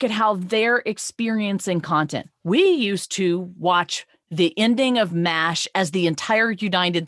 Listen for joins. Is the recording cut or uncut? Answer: uncut